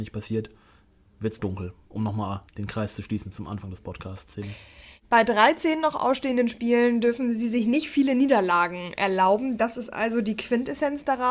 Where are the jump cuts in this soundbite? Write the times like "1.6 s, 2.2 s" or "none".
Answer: 1.1 s, 1.4 s, 2.5 s